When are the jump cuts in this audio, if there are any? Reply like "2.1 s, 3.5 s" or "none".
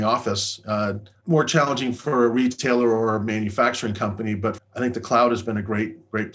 1.1 s, 4.6 s